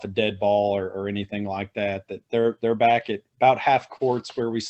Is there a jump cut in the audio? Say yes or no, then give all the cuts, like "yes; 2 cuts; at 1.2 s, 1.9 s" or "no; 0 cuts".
no; 0 cuts